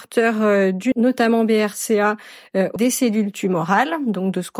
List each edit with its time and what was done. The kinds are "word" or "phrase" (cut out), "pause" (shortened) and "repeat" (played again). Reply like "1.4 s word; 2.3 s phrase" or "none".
0.9 s word; 2.8 s word